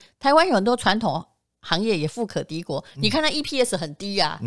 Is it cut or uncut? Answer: uncut